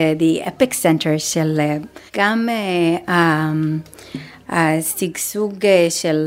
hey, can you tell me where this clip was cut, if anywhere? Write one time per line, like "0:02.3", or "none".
0:02.1